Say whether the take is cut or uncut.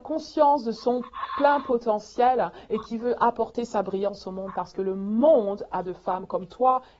cut